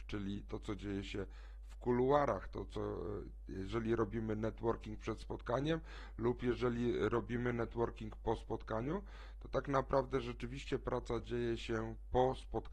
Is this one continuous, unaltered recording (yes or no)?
yes